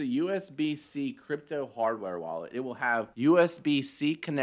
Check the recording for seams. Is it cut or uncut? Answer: cut